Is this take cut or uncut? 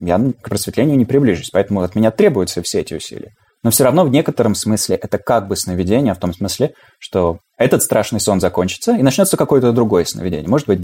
uncut